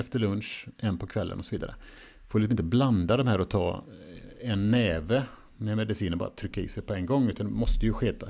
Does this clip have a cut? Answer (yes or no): no